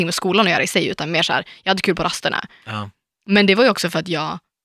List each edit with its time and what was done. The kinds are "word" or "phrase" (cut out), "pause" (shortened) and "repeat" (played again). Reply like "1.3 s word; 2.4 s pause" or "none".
none

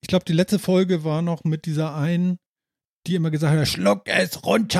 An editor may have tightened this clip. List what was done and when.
none

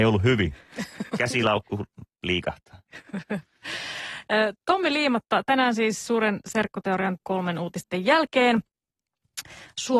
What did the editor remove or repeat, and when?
7.2 s phrase

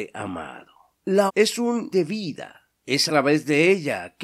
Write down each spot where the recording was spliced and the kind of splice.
1.3 s word; 1.9 s word; 3.1 s word

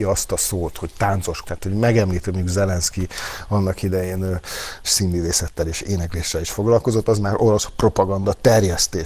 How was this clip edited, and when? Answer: 1.4 s word; 4.8 s word

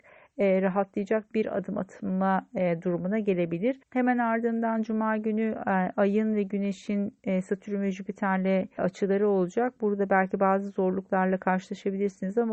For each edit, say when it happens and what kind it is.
3.8 s pause; 8.8 s word

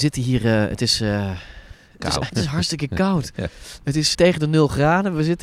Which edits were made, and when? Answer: 2.3 s word; 4.1 s word

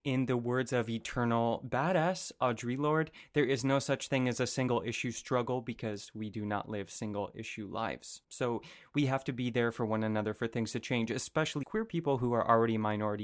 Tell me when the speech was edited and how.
8.2 s pause; 11.6 s word

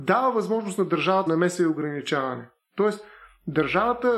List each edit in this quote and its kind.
1.3 s word

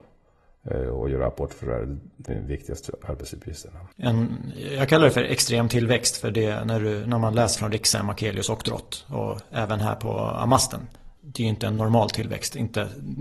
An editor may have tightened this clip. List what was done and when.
2.3 s phrase; 3.9 s pause; 7.6 s word; 11.2 s pause

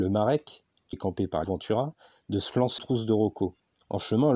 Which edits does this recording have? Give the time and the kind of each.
0.9 s word; 1.4 s word; 2.8 s word

